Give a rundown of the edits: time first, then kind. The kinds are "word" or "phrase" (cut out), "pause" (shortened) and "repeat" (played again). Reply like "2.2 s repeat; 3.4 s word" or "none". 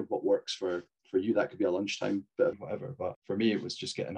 2.5 s word; 3.1 s word